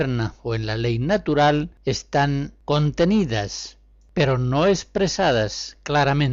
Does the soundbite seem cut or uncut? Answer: uncut